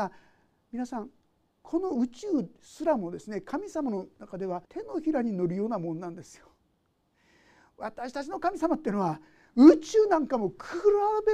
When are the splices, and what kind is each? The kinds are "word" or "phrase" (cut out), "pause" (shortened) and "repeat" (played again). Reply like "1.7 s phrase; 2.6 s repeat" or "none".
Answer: 4.6 s pause